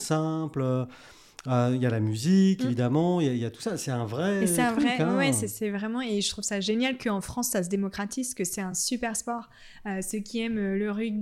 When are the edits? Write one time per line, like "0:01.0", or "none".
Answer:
none